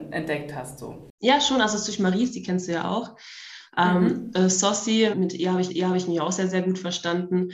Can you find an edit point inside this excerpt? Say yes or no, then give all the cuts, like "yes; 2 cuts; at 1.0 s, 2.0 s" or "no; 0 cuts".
yes; 2 cuts; at 5.1 s, 5.7 s